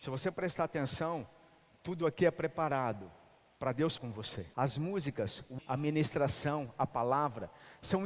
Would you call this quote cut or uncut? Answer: cut